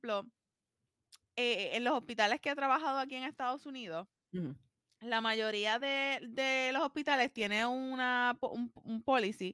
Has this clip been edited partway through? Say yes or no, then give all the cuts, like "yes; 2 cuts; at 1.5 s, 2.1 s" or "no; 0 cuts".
no; 0 cuts